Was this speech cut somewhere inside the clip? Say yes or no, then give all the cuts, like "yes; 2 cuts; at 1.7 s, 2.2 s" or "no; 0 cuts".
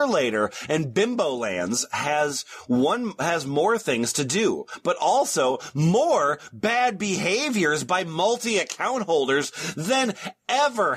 no; 0 cuts